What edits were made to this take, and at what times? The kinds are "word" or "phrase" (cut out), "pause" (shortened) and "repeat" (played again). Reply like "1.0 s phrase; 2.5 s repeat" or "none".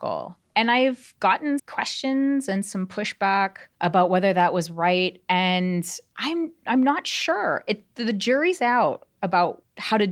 1.6 s word